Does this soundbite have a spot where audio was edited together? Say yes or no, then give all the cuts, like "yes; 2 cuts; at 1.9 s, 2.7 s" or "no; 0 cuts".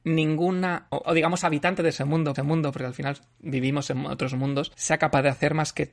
yes; 2 cuts; at 0.9 s, 2.4 s